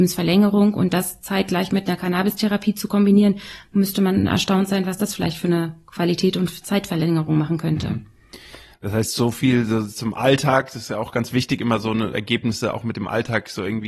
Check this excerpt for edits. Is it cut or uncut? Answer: cut